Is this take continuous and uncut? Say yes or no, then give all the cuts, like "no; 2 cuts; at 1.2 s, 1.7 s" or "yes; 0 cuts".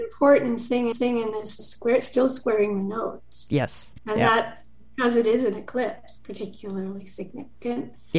no; 4 cuts; at 0.9 s, 1.6 s, 4.0 s, 6.2 s